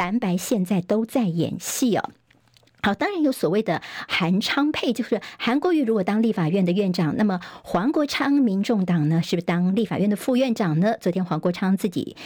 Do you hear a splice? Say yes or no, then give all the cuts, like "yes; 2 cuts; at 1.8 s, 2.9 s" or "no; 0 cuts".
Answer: no; 0 cuts